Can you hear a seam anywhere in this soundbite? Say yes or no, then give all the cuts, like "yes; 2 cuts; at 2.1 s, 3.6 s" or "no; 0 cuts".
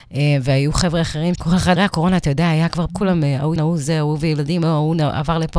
yes; 4 cuts; at 1.3 s, 1.8 s, 2.9 s, 3.6 s